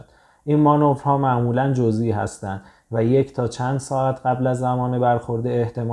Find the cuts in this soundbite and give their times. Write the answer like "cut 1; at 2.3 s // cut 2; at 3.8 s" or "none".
none